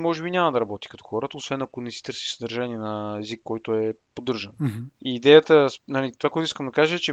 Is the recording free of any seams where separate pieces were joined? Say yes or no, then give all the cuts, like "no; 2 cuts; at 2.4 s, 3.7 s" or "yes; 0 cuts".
yes; 0 cuts